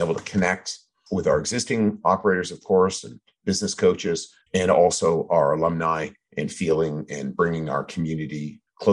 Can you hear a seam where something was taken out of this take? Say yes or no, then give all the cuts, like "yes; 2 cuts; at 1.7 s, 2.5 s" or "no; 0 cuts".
yes; 1 cut; at 4.4 s